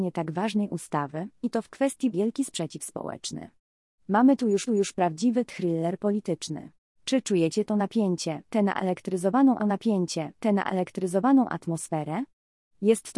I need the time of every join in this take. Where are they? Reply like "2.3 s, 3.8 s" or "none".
2.1 s, 4.7 s, 6.8 s, 9.6 s